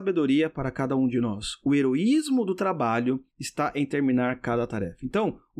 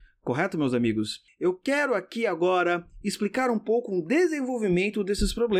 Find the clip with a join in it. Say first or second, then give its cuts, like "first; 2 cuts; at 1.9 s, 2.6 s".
first; 1 cut; at 3.3 s